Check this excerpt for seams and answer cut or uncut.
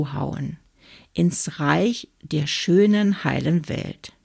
uncut